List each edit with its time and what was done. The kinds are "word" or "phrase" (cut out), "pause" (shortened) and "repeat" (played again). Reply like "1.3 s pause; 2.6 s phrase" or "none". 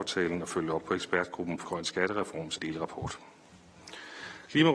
1.6 s word; 2.6 s word